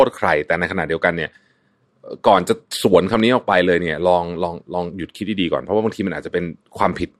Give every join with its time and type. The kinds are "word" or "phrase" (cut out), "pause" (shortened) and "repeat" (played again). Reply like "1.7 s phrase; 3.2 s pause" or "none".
none

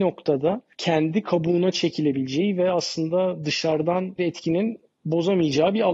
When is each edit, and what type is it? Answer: 4.2 s word

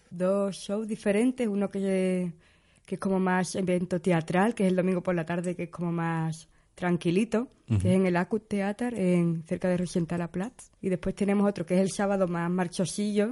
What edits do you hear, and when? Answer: 10.8 s pause

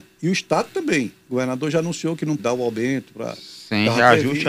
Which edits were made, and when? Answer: 2.4 s word

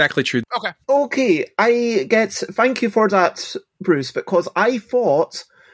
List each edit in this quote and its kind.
none

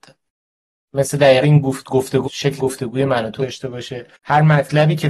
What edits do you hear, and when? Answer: 1.4 s phrase; 2.2 s word; 2.6 s word; 3.4 s word; 4.1 s pause

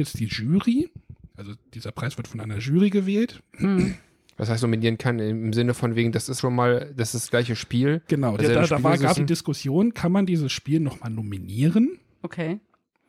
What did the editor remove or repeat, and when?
6.4 s word; 8.4 s word; 9.2 s word

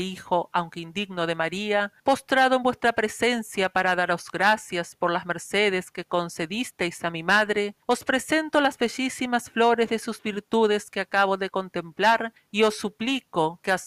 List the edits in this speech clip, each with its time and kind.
2.0 s pause; 7.8 s pause; 12.4 s pause

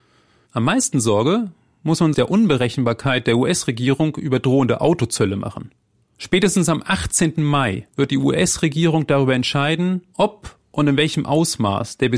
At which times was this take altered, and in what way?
2.1 s phrase

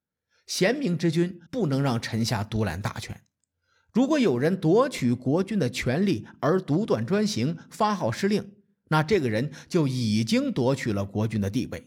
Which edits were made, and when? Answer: 1.5 s pause

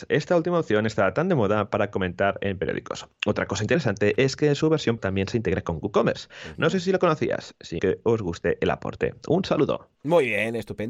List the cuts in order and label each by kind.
5.0 s word; 7.8 s phrase; 10.0 s pause

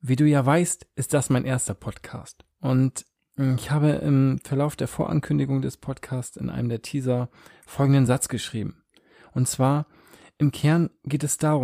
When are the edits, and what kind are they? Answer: none

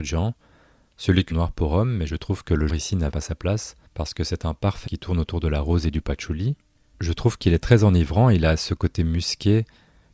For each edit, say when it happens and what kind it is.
1.3 s phrase; 2.7 s word; 3.1 s word; 3.9 s pause; 4.9 s word; 6.7 s pause

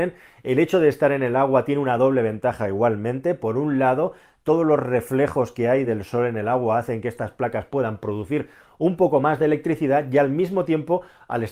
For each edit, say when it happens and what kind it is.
none

